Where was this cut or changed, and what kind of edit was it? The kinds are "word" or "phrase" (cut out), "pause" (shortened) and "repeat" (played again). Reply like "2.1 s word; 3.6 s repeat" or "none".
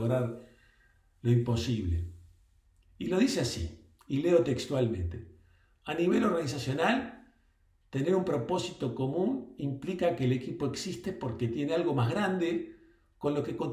none